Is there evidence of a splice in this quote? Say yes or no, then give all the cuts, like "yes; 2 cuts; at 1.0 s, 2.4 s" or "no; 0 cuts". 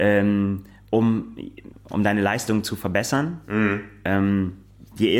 yes; 1 cut; at 1.7 s